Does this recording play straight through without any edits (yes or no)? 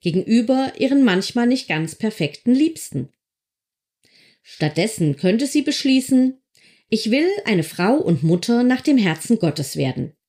yes